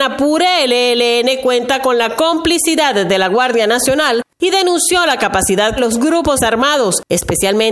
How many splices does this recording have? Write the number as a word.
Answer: two